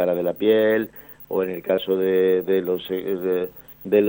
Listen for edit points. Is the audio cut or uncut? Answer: uncut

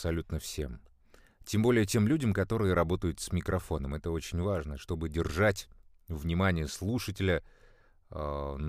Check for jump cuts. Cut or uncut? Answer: uncut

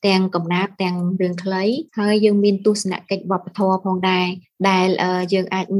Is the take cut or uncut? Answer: cut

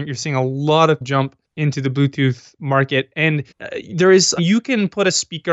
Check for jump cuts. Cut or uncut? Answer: cut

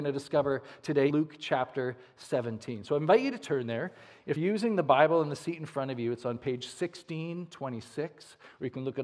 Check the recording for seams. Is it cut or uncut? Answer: cut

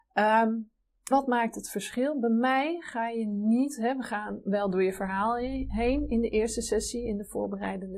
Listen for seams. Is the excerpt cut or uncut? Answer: cut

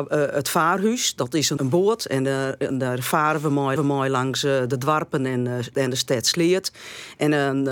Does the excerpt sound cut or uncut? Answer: cut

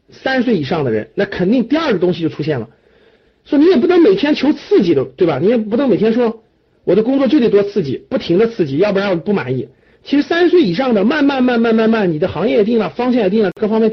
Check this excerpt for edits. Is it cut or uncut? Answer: uncut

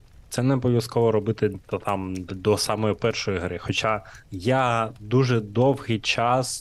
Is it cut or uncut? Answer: cut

